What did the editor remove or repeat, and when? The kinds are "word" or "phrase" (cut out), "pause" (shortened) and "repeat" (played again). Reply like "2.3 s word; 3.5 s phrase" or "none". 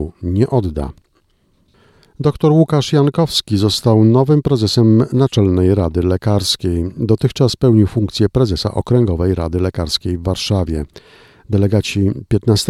none